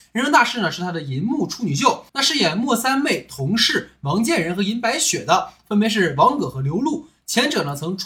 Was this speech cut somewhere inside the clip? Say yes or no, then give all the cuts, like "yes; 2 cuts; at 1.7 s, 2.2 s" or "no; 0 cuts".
yes; 1 cut; at 2.1 s